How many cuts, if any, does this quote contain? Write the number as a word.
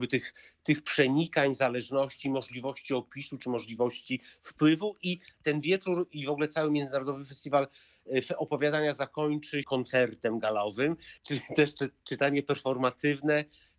two